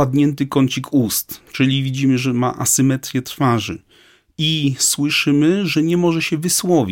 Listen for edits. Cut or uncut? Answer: uncut